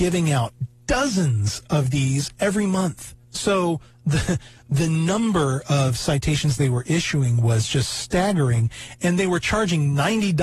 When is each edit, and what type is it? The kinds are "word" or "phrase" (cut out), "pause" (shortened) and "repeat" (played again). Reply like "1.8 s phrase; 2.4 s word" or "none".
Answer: 3.2 s pause

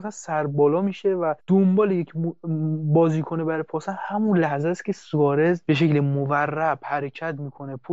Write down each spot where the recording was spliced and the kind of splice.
1.4 s pause

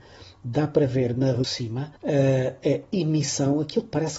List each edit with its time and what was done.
1.4 s phrase; 2.0 s pause

